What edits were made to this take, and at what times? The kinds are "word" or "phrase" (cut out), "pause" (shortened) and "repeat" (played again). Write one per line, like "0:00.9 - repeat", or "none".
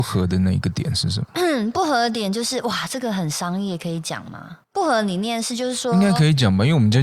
0:04.6 - pause